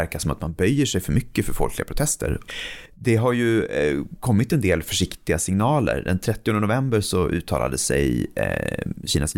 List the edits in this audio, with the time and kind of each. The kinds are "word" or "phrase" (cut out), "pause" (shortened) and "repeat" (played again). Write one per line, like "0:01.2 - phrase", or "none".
none